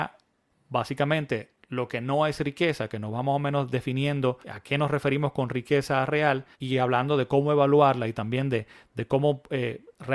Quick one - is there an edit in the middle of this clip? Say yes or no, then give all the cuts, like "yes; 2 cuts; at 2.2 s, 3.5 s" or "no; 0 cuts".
yes; 2 cuts; at 4.4 s, 6.5 s